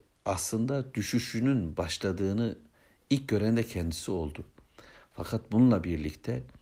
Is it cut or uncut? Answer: uncut